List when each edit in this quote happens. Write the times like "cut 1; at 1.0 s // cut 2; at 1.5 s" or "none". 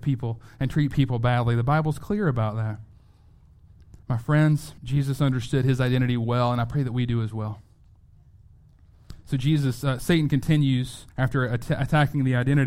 cut 1; at 4.0 s // cut 2; at 4.8 s // cut 3; at 11.1 s